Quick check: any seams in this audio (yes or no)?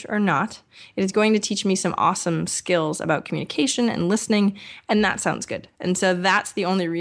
no